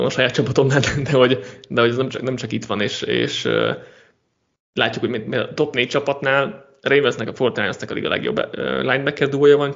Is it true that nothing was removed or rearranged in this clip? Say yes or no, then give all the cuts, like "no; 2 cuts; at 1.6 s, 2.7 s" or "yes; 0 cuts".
yes; 0 cuts